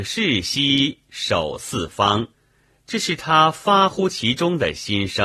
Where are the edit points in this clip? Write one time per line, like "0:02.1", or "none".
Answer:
0:02.3